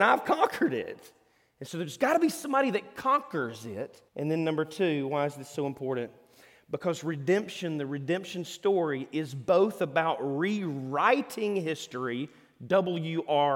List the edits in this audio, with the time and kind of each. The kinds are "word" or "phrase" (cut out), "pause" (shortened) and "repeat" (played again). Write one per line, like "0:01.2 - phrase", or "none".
0:04.1 - pause